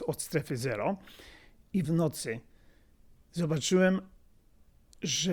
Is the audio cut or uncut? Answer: cut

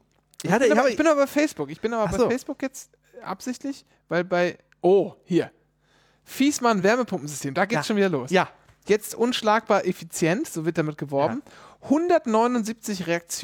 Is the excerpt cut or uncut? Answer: uncut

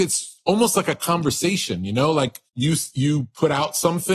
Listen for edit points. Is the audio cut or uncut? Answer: cut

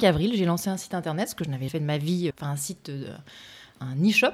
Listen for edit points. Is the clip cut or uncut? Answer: cut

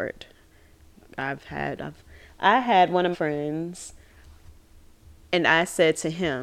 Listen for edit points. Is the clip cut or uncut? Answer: cut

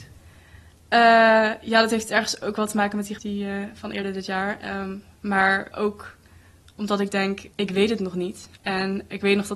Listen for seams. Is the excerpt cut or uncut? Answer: cut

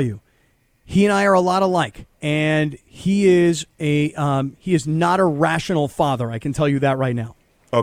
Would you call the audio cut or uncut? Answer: cut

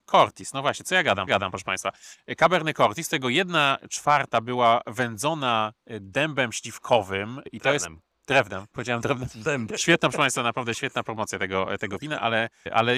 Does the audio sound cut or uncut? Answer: cut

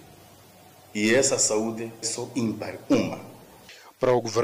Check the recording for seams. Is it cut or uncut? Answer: cut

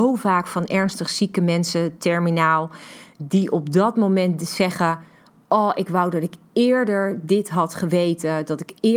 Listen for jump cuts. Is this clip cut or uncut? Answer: uncut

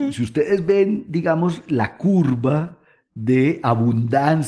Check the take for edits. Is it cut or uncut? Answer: uncut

